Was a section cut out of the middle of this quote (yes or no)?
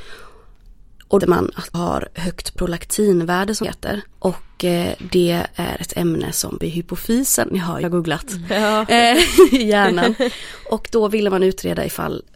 yes